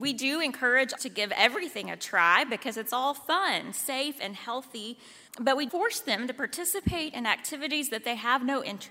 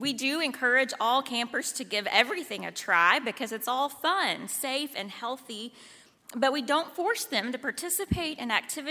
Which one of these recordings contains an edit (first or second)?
first